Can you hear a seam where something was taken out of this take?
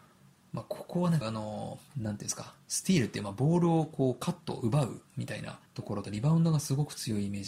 yes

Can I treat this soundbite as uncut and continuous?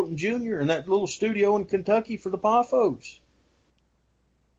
yes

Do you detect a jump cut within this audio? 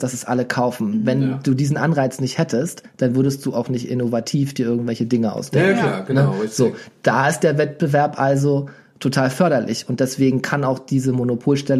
no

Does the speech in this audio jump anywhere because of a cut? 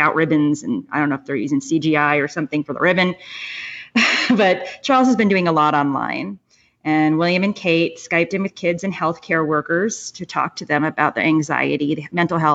no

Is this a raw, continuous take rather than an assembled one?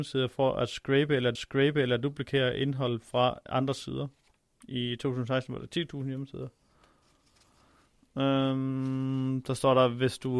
no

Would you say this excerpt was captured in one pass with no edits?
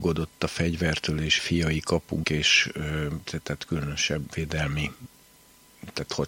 no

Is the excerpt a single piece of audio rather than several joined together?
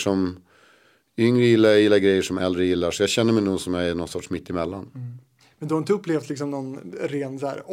yes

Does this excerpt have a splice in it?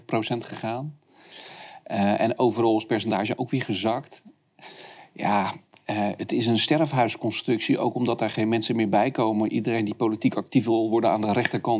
no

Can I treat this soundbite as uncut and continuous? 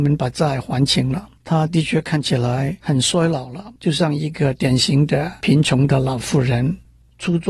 no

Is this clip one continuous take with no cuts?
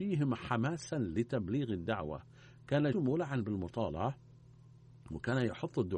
no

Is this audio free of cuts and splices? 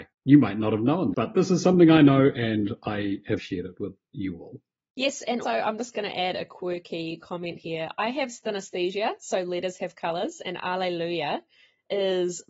no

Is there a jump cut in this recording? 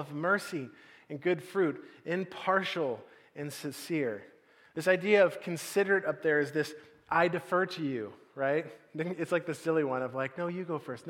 no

